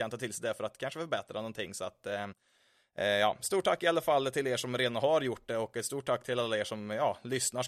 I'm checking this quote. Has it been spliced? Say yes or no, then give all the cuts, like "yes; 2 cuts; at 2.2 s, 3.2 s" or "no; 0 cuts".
no; 0 cuts